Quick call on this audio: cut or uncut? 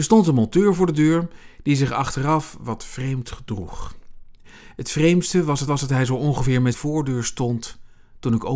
cut